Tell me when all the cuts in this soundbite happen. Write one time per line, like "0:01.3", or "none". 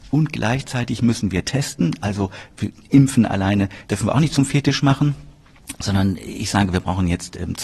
0:03.8